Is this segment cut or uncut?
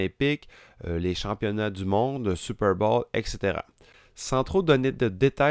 uncut